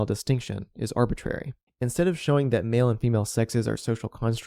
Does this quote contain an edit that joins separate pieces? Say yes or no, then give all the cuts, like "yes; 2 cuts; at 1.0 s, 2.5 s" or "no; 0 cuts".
yes; 1 cut; at 1.7 s